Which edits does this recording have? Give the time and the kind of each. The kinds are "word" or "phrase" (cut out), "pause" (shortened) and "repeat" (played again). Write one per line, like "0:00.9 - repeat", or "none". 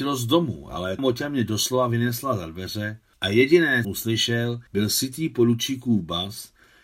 0:01.0 - word
0:03.1 - pause
0:03.8 - phrase
0:04.7 - pause